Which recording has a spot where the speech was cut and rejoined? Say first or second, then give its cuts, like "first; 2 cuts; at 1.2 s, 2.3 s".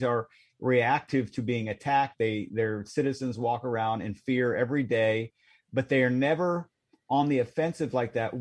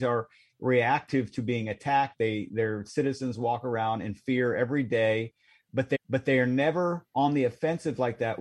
second; 2 cuts; at 5.9 s, 7.1 s